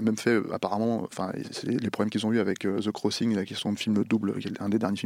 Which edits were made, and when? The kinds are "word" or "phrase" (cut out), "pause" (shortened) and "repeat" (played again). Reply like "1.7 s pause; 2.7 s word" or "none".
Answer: none